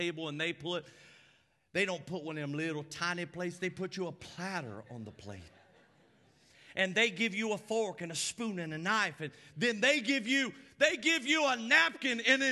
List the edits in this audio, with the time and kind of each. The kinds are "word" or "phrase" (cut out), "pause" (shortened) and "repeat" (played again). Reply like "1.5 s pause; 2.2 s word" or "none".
none